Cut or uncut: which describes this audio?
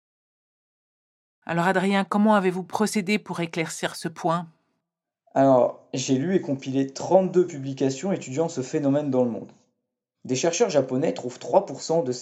uncut